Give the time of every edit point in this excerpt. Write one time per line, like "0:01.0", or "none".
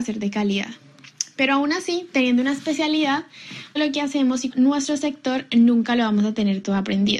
0:03.8
0:04.5